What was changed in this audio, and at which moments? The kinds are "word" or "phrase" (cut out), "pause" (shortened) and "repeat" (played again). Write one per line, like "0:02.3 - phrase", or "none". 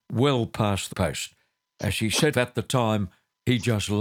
0:00.9 - word
0:02.3 - word